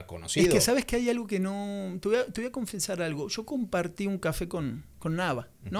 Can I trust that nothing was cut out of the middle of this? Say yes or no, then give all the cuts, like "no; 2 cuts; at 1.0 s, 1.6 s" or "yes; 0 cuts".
yes; 0 cuts